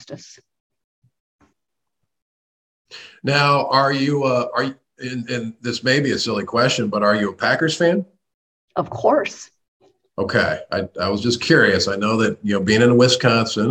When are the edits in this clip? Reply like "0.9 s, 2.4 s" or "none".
none